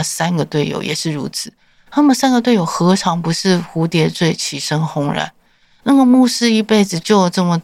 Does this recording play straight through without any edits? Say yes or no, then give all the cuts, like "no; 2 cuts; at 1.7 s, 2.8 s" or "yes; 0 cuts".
yes; 0 cuts